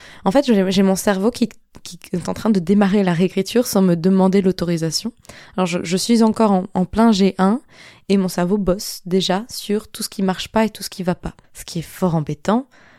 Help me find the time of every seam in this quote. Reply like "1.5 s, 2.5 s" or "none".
11.4 s